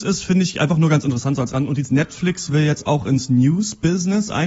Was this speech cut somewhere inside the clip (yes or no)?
no